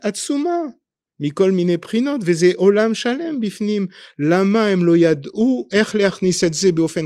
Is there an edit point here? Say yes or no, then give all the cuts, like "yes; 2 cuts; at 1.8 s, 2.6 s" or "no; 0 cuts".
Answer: no; 0 cuts